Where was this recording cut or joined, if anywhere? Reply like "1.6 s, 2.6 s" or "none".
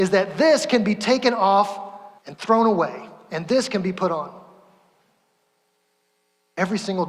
2.2 s